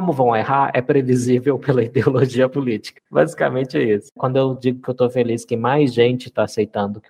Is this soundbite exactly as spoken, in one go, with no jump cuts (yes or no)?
yes